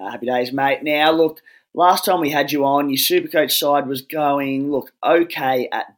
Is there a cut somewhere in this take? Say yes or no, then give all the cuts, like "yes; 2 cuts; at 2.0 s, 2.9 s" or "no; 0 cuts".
no; 0 cuts